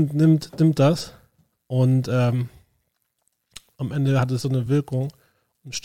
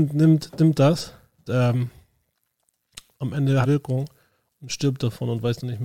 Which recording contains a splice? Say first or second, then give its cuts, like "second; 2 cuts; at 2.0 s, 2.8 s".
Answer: second; 2 cuts; at 1.5 s, 3.6 s